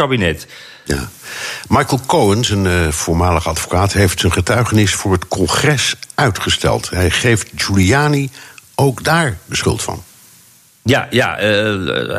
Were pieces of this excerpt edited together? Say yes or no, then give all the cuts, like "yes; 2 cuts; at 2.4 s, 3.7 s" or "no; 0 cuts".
no; 0 cuts